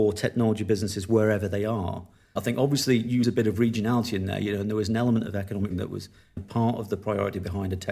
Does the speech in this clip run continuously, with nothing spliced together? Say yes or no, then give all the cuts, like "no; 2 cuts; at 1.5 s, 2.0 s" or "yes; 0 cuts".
no; 4 cuts; at 2.4 s, 3.2 s, 5.7 s, 6.4 s